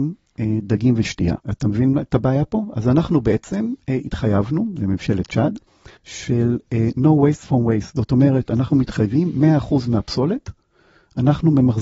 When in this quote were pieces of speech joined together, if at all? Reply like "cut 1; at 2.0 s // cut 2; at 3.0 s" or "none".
cut 1; at 1.4 s // cut 2; at 6.0 s